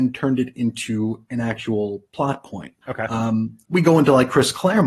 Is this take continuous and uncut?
no; 2 cuts; at 2.8 s, 3.6 s

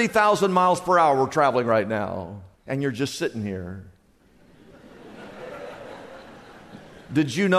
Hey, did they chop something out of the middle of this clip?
yes; 1 cut; at 2.6 s

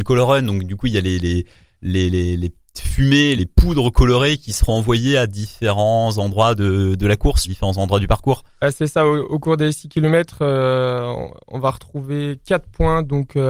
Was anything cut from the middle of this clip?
yes; 2 cuts; at 3.4 s, 7.4 s

